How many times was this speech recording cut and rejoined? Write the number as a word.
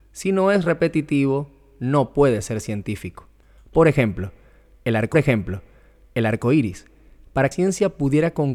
two